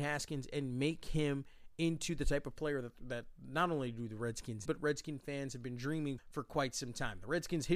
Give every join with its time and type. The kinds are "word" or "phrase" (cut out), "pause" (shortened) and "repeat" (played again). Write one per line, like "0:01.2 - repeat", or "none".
0:04.7 - word
0:06.2 - word